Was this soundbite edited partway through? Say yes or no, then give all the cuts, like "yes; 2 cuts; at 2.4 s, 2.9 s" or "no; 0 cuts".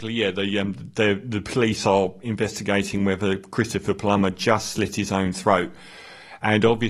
no; 0 cuts